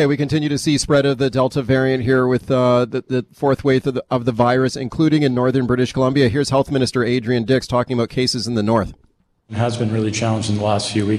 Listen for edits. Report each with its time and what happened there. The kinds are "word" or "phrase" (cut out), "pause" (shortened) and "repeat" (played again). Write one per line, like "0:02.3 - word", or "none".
none